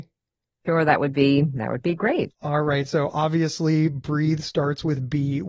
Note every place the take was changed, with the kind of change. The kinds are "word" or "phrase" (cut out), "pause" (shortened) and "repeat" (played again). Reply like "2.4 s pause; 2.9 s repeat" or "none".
2.3 s pause